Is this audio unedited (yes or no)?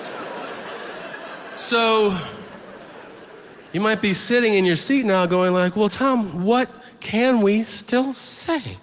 no